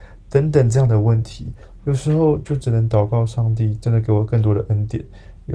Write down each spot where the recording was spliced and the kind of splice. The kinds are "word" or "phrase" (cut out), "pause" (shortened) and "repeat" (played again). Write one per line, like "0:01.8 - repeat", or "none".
none